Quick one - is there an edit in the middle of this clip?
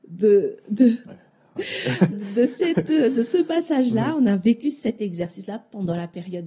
yes; 1 cut; at 2.1 s

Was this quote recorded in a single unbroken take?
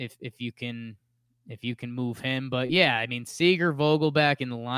yes; 0 cuts

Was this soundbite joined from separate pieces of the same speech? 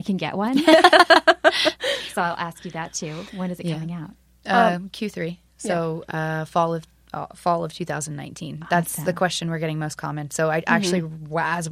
no; 0 cuts

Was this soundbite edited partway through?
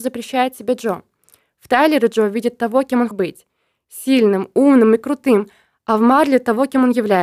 yes; 1 cut; at 3.1 s

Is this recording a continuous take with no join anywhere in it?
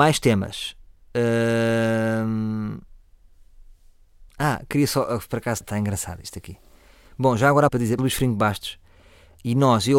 no; 4 cuts; at 4.3 s, 5.6 s, 7.7 s, 8.0 s

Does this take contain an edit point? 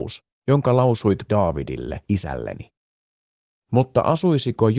yes; 2 cuts; at 1.3 s, 2.0 s

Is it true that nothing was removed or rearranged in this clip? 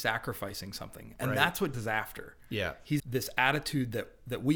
no; 2 cuts; at 1.7 s, 3.0 s

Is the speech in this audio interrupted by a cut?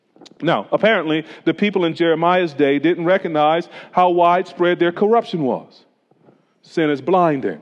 no; 0 cuts

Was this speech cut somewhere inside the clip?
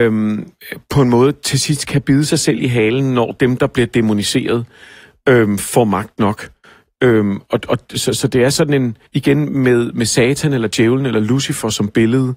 yes; 1 cut; at 9.1 s

